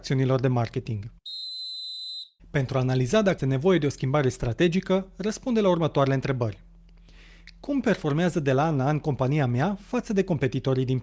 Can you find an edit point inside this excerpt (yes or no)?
yes